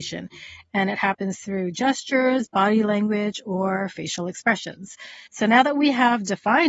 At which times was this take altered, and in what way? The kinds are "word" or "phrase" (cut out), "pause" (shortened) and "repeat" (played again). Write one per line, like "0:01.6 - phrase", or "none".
0:05.3 - pause